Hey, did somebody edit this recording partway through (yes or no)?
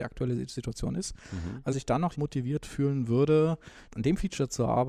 yes